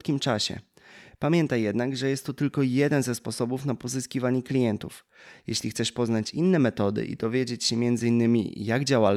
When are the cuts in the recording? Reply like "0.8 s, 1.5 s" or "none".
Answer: none